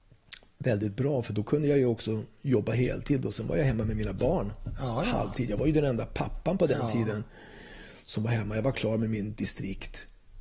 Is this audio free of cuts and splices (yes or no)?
yes